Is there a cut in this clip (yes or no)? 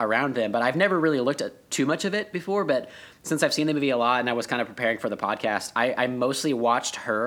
no